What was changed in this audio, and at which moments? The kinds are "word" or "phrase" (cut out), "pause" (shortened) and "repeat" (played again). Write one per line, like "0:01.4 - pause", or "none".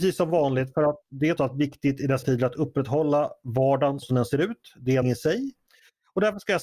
0:01.4 - word
0:02.2 - word
0:04.0 - word
0:05.0 - word